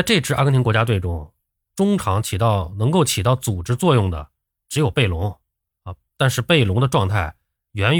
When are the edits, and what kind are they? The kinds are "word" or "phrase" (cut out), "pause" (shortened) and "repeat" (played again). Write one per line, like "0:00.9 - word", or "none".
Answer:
none